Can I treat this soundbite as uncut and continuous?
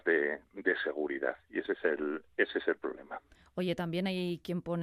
yes; 0 cuts

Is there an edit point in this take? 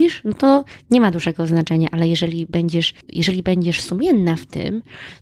no; 0 cuts

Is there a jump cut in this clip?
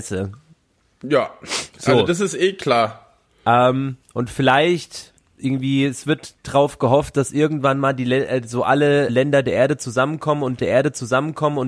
yes; 4 cuts; at 4.0 s, 5.2 s, 9.1 s, 10.6 s

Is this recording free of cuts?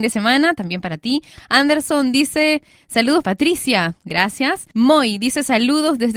no; 2 cuts; at 3.2 s, 4.7 s

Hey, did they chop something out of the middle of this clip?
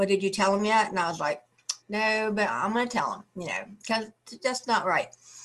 yes; 1 cut; at 1.8 s

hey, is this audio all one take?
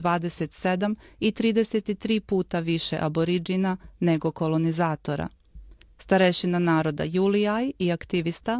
no; 1 cut; at 5.8 s

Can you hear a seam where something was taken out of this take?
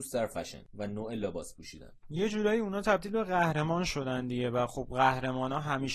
no; 0 cuts

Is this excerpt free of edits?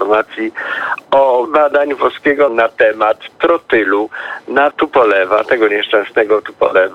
no; 3 cuts; at 1.4 s, 2.5 s, 4.7 s

